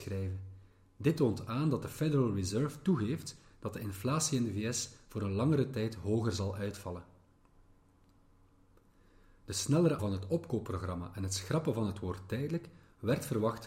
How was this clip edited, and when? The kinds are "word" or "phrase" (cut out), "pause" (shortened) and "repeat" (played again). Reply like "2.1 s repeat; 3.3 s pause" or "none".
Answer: 10.0 s word